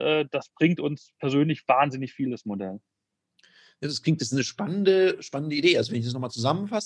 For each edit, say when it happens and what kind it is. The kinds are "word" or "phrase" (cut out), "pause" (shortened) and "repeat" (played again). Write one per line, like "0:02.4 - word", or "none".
none